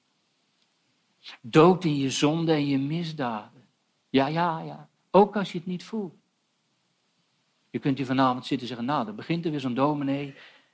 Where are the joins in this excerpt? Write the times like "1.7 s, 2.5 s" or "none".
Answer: none